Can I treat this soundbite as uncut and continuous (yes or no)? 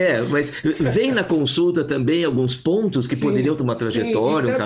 no